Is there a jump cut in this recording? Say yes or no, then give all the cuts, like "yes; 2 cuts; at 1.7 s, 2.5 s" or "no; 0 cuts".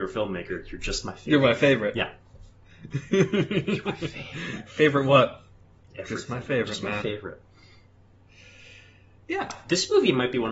no; 0 cuts